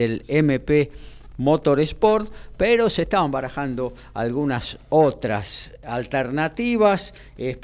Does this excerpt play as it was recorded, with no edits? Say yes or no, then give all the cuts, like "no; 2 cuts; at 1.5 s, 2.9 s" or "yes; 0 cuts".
yes; 0 cuts